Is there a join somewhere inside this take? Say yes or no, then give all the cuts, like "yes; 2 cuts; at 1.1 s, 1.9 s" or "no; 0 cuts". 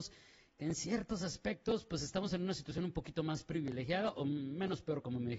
no; 0 cuts